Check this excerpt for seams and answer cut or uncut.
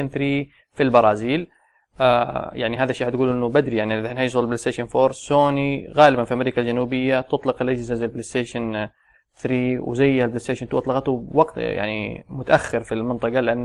uncut